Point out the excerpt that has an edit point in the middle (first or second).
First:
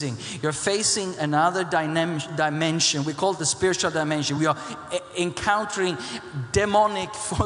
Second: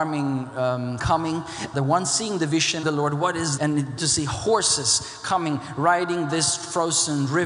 second